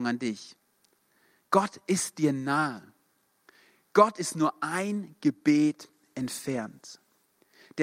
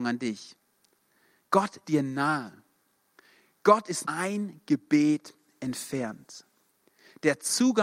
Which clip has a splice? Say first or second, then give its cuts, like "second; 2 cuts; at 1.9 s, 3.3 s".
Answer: second; 2 cuts; at 1.8 s, 4.0 s